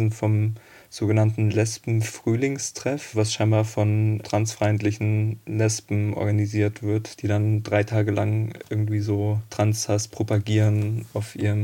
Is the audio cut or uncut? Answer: uncut